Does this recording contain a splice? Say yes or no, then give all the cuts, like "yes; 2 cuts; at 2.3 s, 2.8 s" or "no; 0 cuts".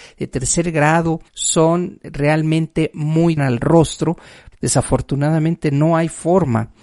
yes; 3 cuts; at 1.3 s, 3.4 s, 4.5 s